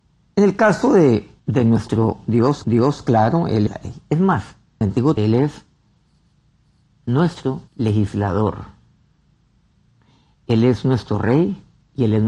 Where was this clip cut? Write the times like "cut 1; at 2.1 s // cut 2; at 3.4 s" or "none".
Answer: cut 1; at 1.4 s // cut 2; at 2.6 s // cut 3; at 3.7 s // cut 4; at 4.8 s // cut 5; at 5.2 s // cut 6; at 7.7 s